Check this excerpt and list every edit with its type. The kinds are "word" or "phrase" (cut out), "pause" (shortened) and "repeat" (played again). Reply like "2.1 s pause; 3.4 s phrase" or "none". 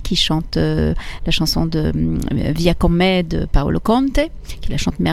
none